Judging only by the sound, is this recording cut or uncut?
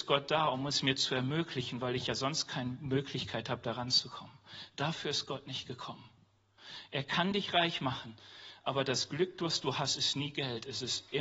uncut